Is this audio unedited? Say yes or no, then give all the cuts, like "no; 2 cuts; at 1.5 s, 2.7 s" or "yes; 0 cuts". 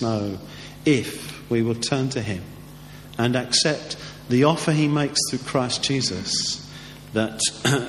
yes; 0 cuts